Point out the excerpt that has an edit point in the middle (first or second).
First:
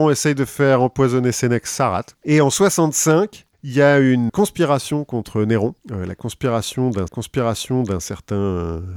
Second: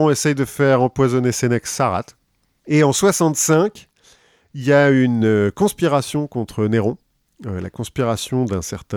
first